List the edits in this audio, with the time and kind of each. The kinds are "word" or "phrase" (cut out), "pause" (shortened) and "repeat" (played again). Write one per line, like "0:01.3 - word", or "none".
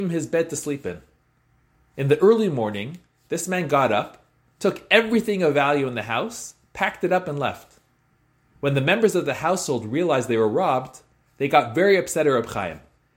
none